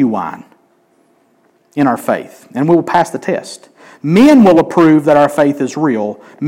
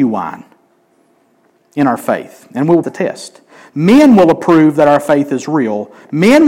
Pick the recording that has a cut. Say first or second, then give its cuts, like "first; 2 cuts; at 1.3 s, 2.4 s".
second; 1 cut; at 2.8 s